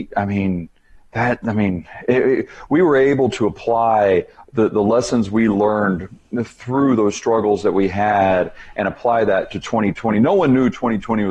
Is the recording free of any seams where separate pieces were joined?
no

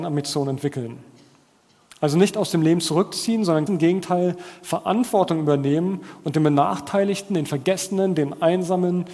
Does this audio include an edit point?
yes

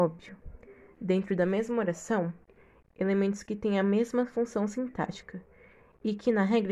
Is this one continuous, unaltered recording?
yes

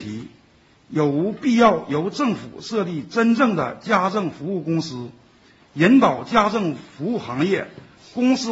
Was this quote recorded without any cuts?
yes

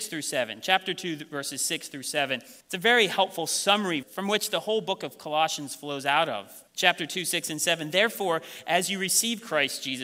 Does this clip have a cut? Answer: yes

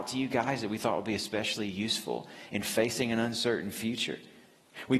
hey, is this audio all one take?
yes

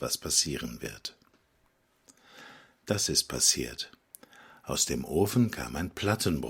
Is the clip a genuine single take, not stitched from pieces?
yes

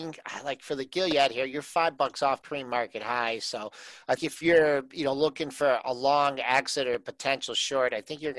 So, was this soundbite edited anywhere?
yes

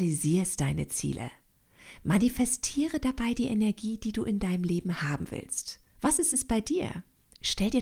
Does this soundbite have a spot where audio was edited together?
no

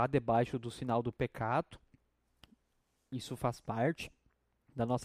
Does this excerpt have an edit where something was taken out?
no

